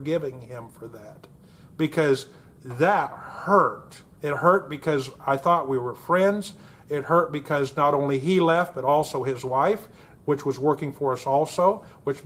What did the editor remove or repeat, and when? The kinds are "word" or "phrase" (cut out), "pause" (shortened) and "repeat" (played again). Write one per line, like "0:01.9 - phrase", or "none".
0:04.2 - pause